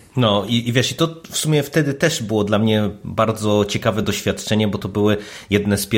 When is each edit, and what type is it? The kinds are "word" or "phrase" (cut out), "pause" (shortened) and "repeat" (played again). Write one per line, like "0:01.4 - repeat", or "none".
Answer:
none